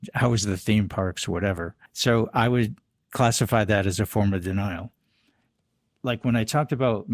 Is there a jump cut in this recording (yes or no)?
yes